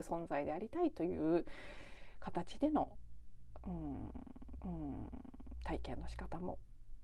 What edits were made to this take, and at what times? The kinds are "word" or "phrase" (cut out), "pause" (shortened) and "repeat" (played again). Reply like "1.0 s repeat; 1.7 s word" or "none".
4.6 s repeat